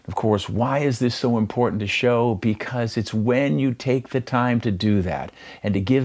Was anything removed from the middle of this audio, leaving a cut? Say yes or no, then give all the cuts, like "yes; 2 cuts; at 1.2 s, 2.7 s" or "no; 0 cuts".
no; 0 cuts